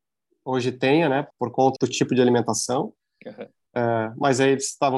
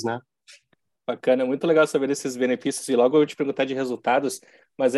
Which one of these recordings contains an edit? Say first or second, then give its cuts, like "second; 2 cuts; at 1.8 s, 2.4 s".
first; 2 cuts; at 1.3 s, 1.8 s